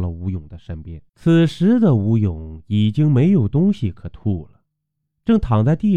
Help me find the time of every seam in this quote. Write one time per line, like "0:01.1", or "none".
0:01.1